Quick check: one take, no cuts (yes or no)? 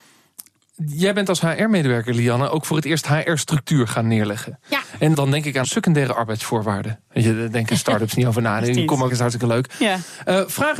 no